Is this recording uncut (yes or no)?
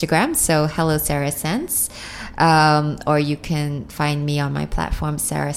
yes